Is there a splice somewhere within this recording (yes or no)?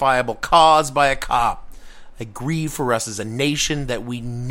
no